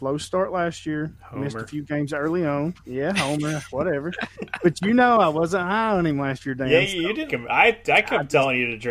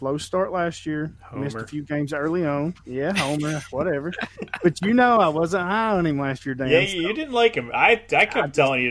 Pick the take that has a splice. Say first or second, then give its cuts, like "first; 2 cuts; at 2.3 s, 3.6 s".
first; 1 cut; at 7.3 s